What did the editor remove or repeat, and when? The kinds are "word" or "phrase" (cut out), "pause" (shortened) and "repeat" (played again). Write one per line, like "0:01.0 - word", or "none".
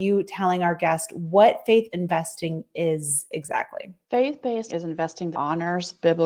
0:01.9 - word
0:04.0 - pause
0:04.7 - word
0:05.3 - word